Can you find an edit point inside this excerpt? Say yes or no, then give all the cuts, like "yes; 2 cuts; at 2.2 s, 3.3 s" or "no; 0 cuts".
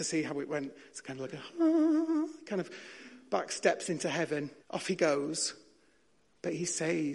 yes; 1 cut; at 4.6 s